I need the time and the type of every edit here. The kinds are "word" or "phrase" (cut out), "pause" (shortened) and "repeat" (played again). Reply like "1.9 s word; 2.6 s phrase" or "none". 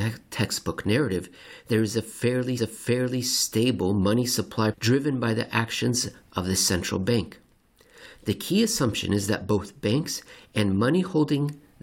2.6 s repeat; 4.7 s word